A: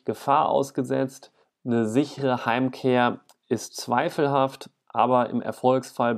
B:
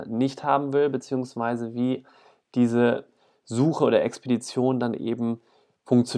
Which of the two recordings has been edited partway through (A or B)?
A